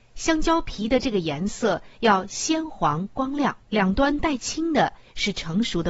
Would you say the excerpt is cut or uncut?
cut